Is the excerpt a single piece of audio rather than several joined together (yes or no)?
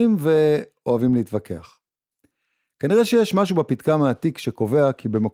yes